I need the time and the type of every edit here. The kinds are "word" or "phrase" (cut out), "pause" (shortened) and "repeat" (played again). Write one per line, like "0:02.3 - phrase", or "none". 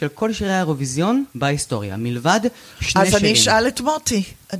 0:01.3 - pause